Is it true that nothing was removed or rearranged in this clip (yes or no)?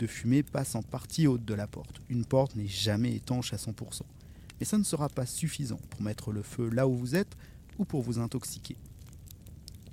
yes